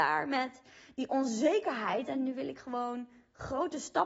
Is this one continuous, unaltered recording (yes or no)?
yes